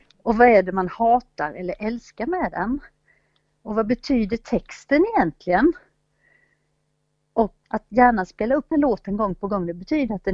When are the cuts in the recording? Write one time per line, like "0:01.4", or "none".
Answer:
0:07.6
0:08.7